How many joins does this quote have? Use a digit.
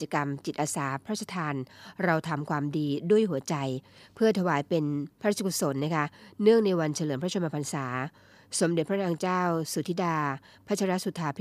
1